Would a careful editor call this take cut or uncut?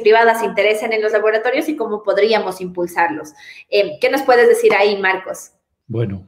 uncut